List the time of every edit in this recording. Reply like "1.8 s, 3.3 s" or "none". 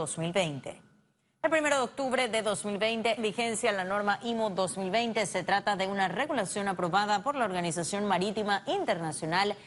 3.2 s